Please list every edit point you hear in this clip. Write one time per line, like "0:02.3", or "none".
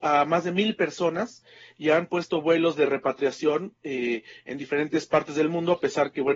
none